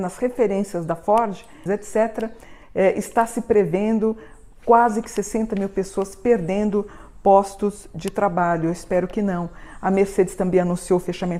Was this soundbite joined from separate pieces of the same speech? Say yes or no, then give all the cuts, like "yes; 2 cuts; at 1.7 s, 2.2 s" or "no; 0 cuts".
yes; 2 cuts; at 1.7 s, 2.6 s